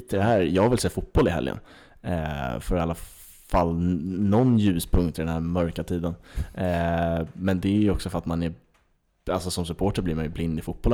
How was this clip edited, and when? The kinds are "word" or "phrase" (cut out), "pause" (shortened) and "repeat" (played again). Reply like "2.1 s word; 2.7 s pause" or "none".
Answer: none